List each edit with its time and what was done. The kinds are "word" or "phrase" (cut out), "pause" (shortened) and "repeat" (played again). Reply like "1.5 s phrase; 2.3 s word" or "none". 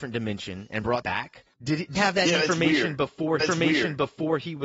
1.0 s word; 1.5 s pause; 2.0 s word; 3.4 s repeat